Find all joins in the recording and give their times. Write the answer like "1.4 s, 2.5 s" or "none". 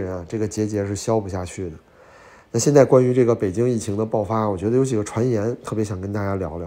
none